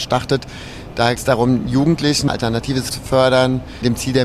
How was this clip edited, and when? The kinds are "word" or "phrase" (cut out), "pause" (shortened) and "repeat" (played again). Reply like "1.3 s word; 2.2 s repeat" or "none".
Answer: 1.2 s word; 2.3 s word; 2.9 s word